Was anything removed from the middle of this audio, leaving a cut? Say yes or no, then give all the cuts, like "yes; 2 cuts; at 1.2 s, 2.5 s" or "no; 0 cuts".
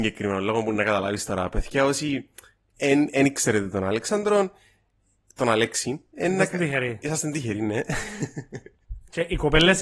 no; 0 cuts